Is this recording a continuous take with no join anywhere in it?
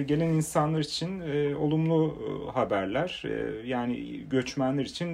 yes; 0 cuts

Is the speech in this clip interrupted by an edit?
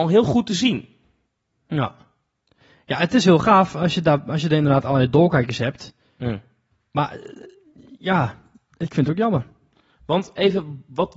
no; 0 cuts

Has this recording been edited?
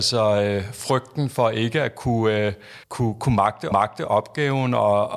yes; 2 cuts; at 2.8 s, 3.7 s

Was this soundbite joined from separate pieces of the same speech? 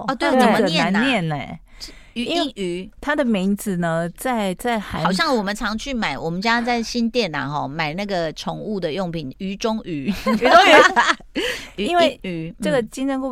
no; 0 cuts

